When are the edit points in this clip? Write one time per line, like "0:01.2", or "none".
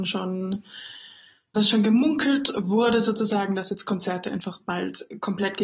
0:01.5